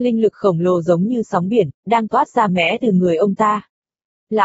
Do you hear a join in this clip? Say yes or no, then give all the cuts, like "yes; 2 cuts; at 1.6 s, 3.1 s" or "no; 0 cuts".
yes; 1 cut; at 2.5 s